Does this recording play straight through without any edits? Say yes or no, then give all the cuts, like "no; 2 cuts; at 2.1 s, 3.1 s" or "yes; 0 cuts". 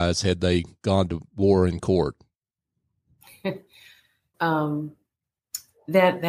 no; 1 cut; at 4.3 s